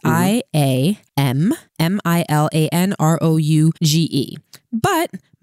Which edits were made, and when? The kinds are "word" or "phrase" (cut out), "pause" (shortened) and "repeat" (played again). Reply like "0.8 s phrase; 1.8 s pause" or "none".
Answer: 1.1 s pause; 1.7 s pause; 3.8 s pause